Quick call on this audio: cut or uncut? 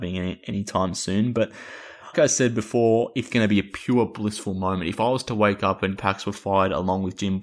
cut